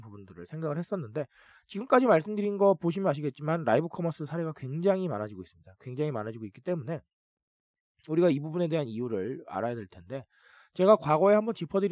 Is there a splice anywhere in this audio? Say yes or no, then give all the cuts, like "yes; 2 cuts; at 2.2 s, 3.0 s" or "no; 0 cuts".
no; 0 cuts